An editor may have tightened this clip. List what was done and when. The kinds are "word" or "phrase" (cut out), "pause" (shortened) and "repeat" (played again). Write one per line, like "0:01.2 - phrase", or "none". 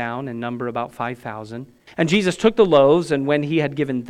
0:01.9 - pause